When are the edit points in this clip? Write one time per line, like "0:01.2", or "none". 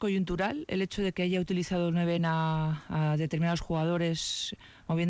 none